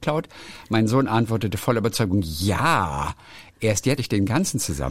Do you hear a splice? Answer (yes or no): yes